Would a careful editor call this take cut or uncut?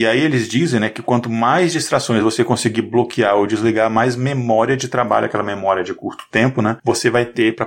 uncut